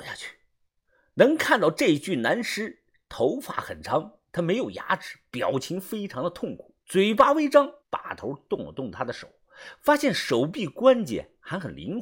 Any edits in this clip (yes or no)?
yes